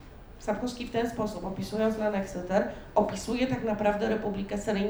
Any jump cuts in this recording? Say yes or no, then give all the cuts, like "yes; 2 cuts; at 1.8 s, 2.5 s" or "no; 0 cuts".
no; 0 cuts